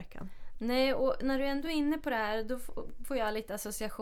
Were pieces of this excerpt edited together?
no; 0 cuts

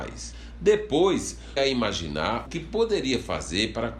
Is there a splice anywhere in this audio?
yes; 2 cuts; at 1.6 s, 2.5 s

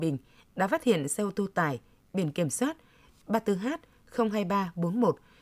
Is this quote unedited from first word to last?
yes; 0 cuts

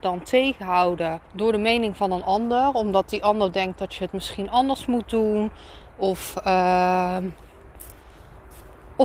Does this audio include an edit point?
yes; 1 cut; at 1.2 s

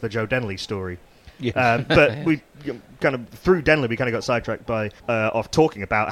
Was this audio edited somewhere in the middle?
yes; 1 cut; at 5.0 s

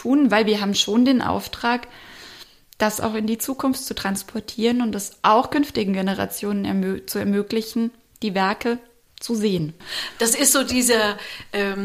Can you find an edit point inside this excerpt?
no; 0 cuts

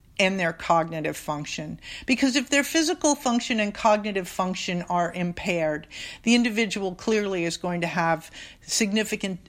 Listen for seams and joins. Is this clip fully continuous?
yes; 0 cuts

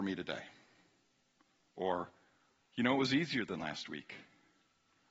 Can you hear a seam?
no; 0 cuts

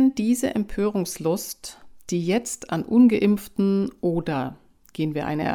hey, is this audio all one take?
yes; 0 cuts

